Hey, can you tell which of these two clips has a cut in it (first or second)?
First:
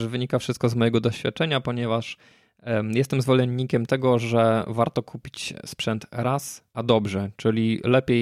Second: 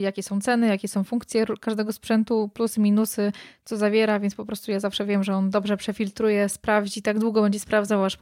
first